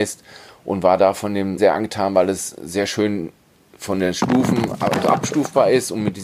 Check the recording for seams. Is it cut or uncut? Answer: cut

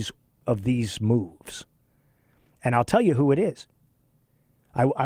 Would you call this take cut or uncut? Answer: uncut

